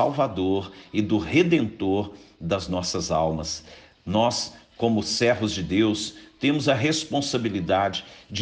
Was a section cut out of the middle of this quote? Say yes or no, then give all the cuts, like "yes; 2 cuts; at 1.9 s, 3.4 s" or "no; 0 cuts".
no; 0 cuts